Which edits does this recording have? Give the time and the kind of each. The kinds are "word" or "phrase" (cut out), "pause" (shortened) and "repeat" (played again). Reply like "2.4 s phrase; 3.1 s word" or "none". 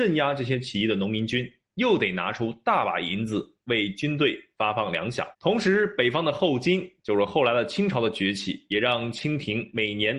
5.3 s pause